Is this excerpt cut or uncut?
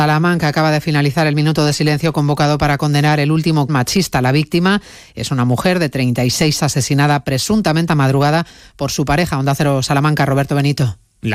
cut